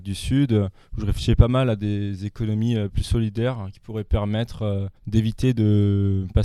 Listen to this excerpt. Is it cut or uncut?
cut